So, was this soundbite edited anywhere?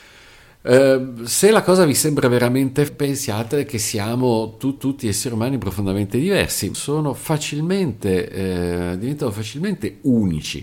yes; 3 cuts; at 2.9 s, 4.8 s, 6.7 s

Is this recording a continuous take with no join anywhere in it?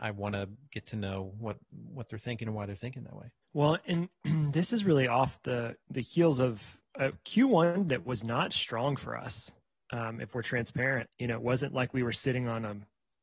no; 4 cuts; at 3.4 s, 5.8 s, 6.8 s, 9.6 s

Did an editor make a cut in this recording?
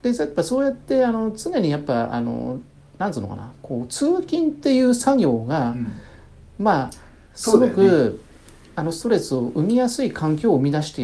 no; 0 cuts

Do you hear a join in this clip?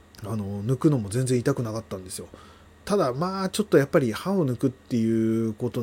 no; 0 cuts

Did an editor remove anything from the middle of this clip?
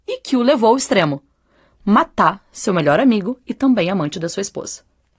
no; 0 cuts

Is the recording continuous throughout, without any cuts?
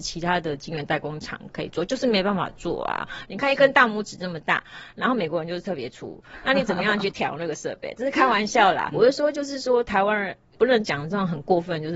no; 1 cut; at 8.9 s

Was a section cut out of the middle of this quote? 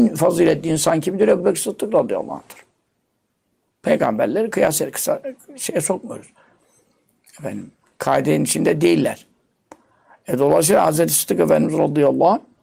no; 0 cuts

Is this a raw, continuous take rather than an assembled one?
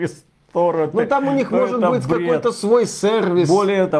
yes; 0 cuts

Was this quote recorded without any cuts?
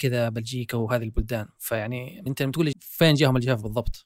no; 2 cuts; at 2.3 s, 2.7 s

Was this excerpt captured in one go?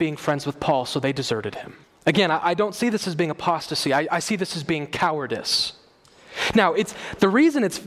no; 1 cut; at 1.8 s

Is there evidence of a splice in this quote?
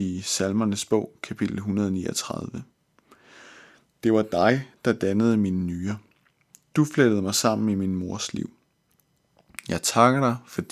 no; 0 cuts

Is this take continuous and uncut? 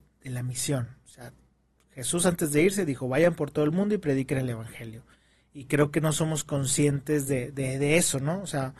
yes; 0 cuts

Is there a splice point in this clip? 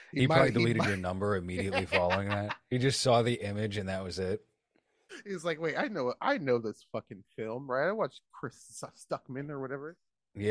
no; 0 cuts

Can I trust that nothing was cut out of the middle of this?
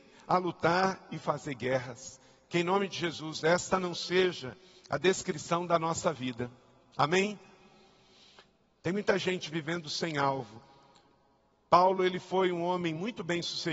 yes; 0 cuts

